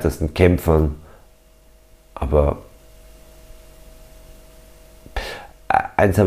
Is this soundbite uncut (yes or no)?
yes